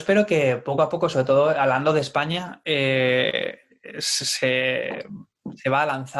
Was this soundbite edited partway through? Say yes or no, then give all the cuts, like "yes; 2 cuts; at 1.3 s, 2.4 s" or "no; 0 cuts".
no; 0 cuts